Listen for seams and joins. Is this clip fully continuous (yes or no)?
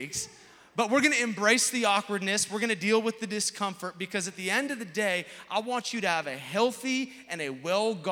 yes